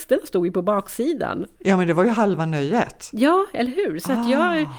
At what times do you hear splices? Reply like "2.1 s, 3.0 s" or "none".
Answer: 1.6 s